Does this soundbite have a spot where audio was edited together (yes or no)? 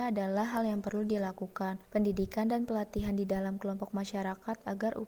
yes